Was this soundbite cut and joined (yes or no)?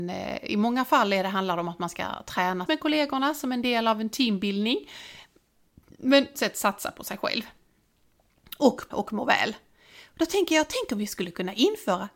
yes